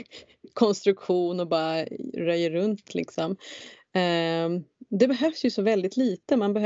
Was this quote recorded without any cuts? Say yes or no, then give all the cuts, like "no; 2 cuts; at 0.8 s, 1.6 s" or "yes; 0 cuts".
yes; 0 cuts